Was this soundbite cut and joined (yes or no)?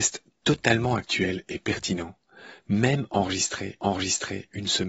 yes